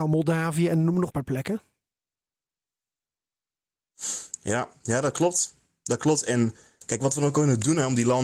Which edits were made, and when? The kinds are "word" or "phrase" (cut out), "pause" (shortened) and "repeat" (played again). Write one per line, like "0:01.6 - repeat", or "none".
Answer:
0:01.1 - phrase